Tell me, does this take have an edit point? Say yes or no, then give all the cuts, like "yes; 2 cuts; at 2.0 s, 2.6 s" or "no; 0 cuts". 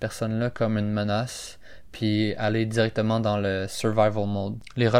no; 0 cuts